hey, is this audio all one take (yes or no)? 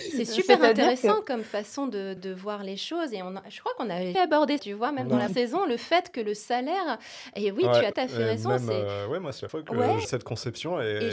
no